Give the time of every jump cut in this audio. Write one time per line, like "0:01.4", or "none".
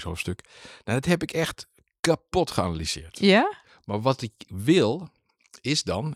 none